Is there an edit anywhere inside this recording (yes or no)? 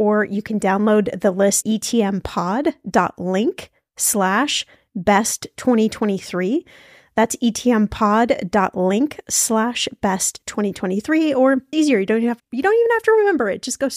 yes